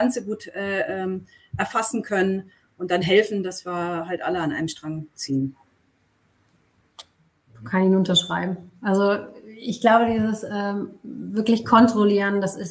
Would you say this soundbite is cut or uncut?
uncut